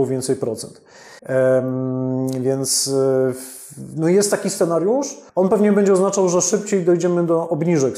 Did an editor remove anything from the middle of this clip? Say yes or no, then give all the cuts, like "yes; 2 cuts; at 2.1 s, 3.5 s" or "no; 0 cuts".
yes; 2 cuts; at 1.2 s, 5.3 s